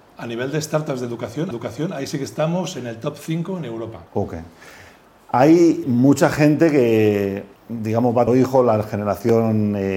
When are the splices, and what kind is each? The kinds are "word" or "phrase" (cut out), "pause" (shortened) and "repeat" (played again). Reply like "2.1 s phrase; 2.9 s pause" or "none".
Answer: 1.5 s repeat; 4.1 s pause; 5.8 s word; 7.6 s pause; 8.3 s word